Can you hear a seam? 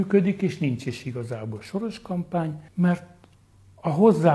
no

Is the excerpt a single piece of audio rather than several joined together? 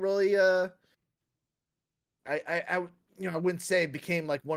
yes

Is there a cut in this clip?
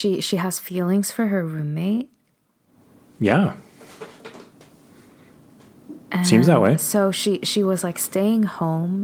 no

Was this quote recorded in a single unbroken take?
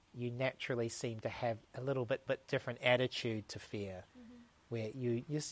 no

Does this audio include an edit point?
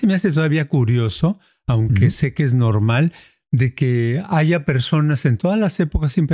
no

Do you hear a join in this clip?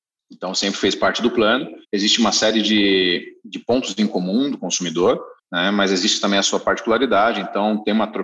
yes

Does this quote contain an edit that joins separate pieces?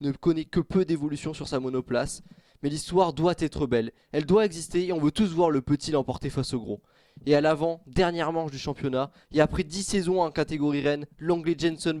no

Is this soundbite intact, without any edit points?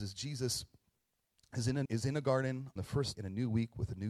no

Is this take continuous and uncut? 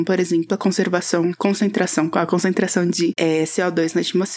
no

